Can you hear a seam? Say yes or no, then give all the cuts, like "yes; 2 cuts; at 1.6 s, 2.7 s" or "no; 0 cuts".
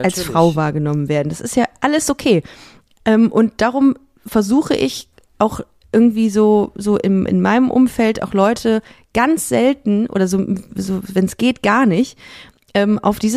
no; 0 cuts